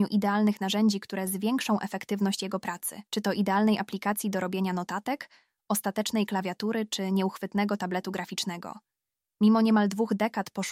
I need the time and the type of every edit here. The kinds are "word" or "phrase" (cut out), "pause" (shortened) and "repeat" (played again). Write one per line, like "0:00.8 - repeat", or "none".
0:03.1 - pause

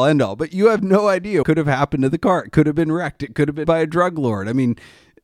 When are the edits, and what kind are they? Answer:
0:01.4 - word
0:03.6 - word

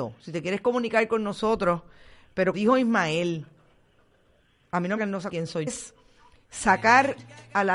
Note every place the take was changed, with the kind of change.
0:02.5 - word
0:05.0 - phrase
0:05.3 - word
0:05.7 - phrase

